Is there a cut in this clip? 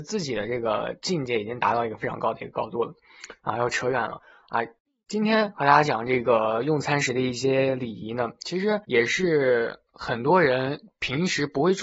yes; 1 cut; at 8.8 s

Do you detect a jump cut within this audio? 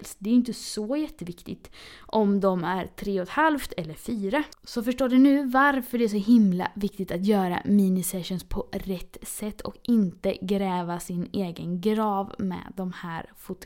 no; 0 cuts

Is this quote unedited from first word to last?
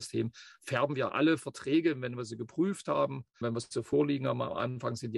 no; 2 cuts; at 1.1 s, 3.4 s

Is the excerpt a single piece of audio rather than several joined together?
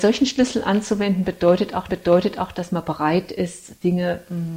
no; 1 cut; at 1.9 s

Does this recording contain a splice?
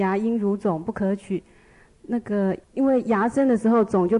yes; 1 cut; at 2.6 s

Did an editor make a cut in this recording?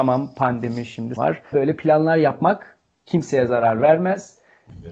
yes; 2 cuts; at 1.2 s, 1.5 s

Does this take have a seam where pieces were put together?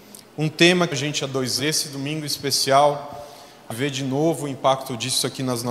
yes; 3 cuts; at 0.9 s, 1.6 s, 3.7 s

